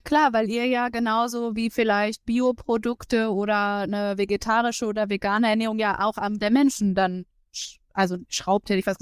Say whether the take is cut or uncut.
cut